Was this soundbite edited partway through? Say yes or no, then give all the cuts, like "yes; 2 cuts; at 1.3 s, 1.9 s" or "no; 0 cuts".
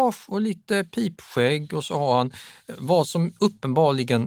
no; 0 cuts